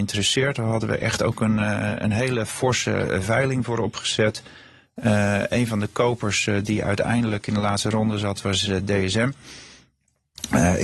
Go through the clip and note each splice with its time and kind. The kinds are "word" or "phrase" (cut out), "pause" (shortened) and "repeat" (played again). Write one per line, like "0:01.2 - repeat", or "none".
none